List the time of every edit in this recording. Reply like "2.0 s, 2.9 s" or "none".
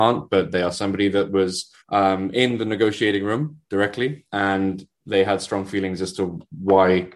1.8 s

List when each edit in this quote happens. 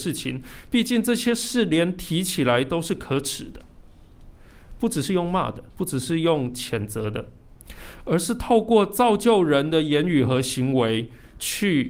5.7 s

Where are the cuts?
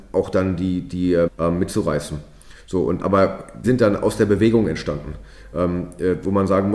1.3 s, 3.0 s, 3.6 s

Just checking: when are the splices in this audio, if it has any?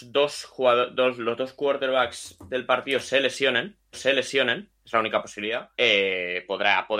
3.9 s, 5.7 s

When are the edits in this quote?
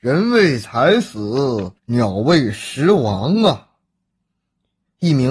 1.8 s

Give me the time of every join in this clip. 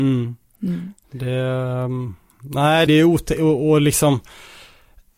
2.9 s

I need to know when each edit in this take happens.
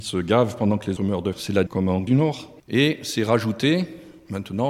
1.0 s, 1.3 s, 1.7 s, 2.1 s, 2.6 s

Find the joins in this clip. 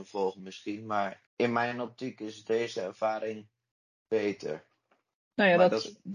1.3 s

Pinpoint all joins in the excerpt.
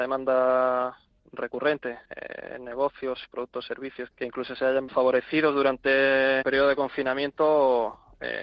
2.0 s, 4.1 s, 4.9 s, 6.4 s

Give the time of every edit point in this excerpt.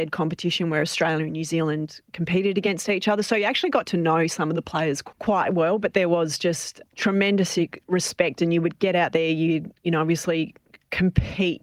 none

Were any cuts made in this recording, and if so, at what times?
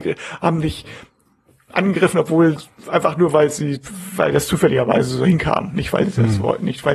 none

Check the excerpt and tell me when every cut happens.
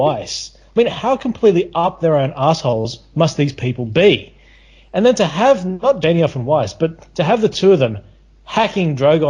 6.0 s

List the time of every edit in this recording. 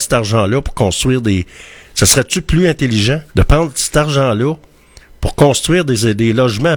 3.3 s

